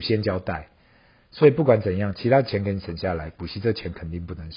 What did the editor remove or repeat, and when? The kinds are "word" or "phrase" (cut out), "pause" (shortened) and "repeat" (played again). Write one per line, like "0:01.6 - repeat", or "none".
none